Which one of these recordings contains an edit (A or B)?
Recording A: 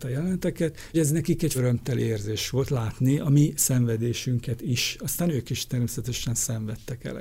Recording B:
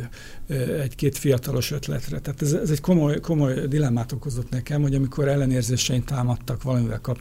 A